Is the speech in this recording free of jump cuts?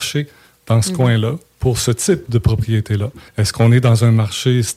no; 1 cut; at 3.3 s

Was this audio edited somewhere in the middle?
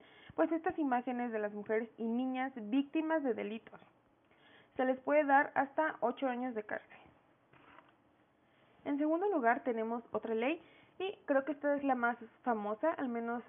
no; 0 cuts

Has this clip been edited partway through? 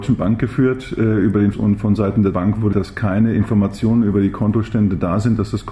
yes; 3 cuts; at 1.5 s, 2.3 s, 2.7 s

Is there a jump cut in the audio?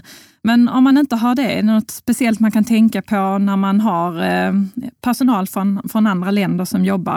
no; 0 cuts

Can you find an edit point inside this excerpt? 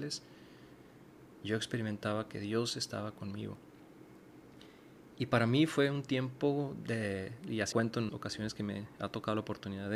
yes; 2 cuts; at 7.7 s, 8.1 s

